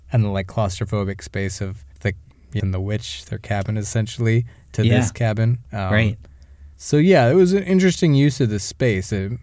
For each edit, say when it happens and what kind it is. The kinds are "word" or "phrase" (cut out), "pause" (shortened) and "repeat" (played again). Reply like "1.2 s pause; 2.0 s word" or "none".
1.9 s pause; 2.6 s phrase; 5.7 s pause; 6.7 s pause